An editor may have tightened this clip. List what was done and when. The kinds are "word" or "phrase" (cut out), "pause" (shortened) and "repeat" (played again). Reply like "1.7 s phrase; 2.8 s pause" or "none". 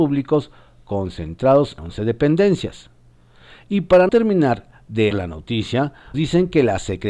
1.8 s word; 4.1 s word; 5.1 s word; 6.1 s word